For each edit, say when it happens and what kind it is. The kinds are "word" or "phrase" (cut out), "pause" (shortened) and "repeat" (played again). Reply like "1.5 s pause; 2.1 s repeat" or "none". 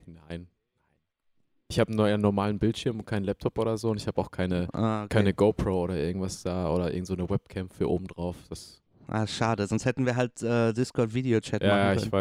8.9 s pause